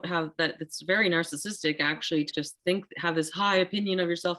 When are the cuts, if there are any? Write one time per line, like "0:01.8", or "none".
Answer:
0:02.3